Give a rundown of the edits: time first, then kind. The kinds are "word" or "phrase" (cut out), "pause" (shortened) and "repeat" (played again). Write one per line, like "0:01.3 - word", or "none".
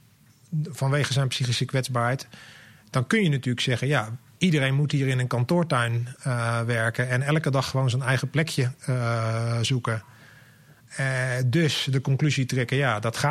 none